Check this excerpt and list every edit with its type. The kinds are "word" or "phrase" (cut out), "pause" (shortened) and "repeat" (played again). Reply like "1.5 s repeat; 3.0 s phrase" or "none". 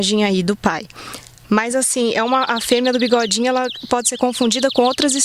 none